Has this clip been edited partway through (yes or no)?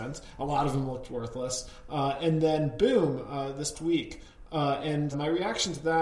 yes